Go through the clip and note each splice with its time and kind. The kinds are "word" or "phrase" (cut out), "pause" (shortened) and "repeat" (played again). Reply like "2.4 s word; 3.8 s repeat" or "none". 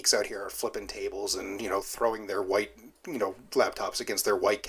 none